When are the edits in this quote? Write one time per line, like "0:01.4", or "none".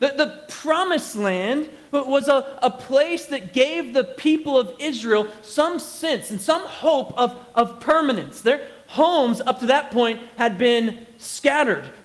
none